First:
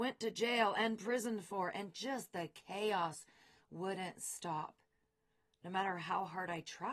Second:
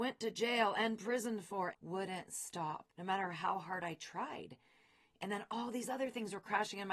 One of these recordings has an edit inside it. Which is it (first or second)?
second